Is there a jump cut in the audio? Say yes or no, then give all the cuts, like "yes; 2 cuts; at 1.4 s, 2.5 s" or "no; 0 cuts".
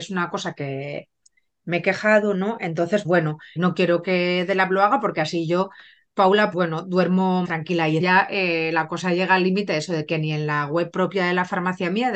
yes; 5 cuts; at 3.0 s, 3.6 s, 6.5 s, 7.4 s, 8.0 s